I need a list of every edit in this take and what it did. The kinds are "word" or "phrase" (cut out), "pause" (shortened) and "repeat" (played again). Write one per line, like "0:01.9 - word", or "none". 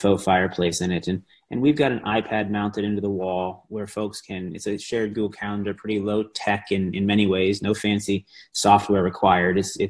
none